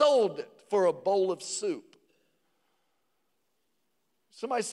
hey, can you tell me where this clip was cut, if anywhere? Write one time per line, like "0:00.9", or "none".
none